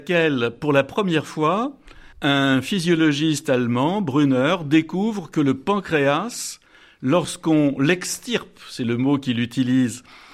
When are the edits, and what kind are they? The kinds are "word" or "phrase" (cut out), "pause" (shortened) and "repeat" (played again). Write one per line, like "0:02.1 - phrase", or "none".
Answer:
0:02.1 - pause